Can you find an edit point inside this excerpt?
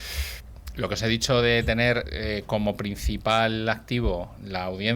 no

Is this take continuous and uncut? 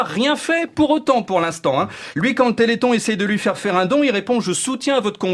yes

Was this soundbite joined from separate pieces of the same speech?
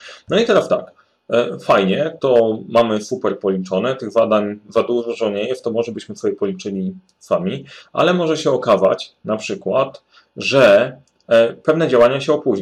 no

